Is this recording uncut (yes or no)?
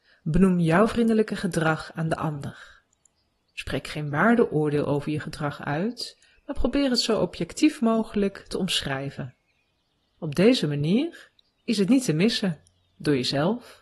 yes